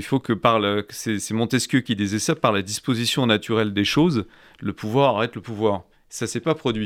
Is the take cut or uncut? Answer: uncut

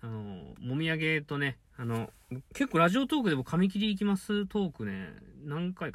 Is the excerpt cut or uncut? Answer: cut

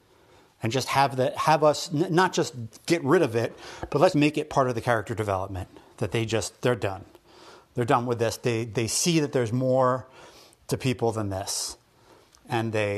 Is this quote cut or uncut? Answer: cut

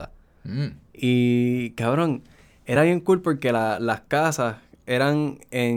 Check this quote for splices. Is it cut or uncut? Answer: uncut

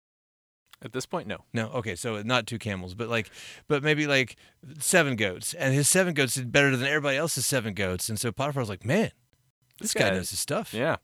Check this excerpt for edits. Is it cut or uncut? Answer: uncut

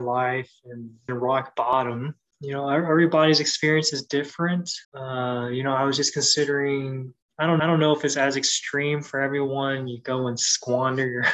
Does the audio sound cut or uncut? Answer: cut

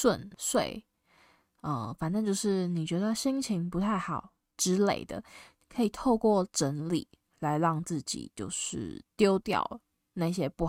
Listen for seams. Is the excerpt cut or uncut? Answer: uncut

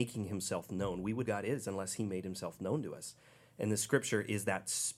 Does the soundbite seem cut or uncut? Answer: cut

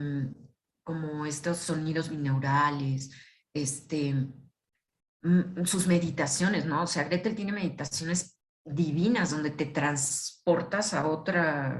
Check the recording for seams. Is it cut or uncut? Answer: uncut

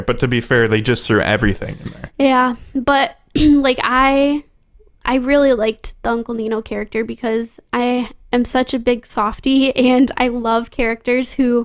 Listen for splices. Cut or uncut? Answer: uncut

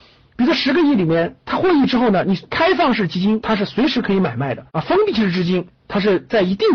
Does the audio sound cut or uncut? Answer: cut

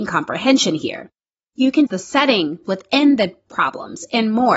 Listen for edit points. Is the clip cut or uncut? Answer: cut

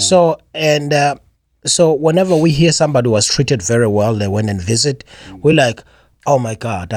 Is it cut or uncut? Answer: uncut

